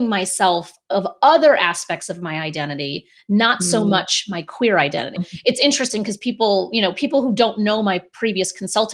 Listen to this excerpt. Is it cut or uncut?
cut